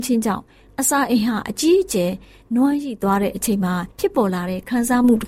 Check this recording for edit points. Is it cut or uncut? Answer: cut